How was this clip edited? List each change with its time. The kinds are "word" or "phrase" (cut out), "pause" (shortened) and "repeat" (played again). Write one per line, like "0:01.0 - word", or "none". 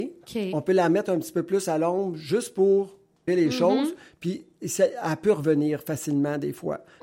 0:03.3 - word